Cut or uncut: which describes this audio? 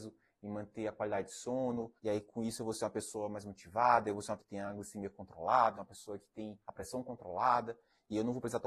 cut